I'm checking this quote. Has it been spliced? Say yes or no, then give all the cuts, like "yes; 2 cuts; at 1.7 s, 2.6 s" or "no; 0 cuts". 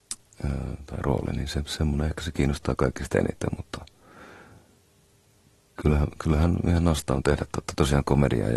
no; 0 cuts